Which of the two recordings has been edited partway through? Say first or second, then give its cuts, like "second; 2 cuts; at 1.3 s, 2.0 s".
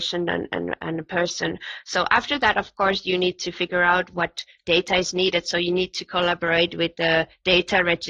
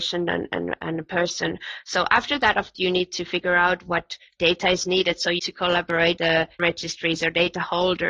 second; 4 cuts; at 2.7 s, 5.4 s, 6.2 s, 6.6 s